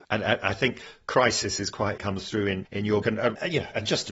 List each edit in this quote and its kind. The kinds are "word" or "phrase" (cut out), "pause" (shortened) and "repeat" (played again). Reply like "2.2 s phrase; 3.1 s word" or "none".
2.0 s phrase; 2.6 s word; 3.0 s word